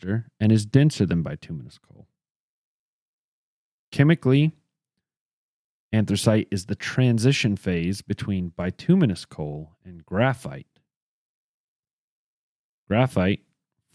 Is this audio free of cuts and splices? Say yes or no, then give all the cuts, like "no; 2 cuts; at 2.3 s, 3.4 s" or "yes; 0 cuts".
yes; 0 cuts